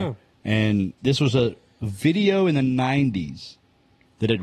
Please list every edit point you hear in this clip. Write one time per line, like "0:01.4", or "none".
0:01.0